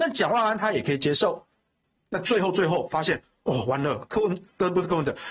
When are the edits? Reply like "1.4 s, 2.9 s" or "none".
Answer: none